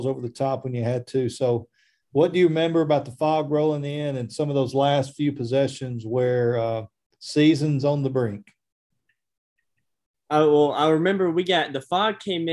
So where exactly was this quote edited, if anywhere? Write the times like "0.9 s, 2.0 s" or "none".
none